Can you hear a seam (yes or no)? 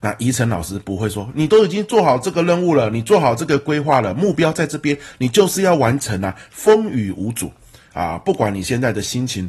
no